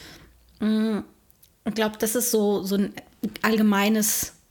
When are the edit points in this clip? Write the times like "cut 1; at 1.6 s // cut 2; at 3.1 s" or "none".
none